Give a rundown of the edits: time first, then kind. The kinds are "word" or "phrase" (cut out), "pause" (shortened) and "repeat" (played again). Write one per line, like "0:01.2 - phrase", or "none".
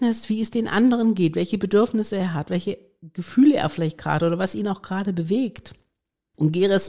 none